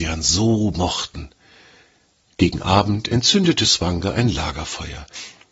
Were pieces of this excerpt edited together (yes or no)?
no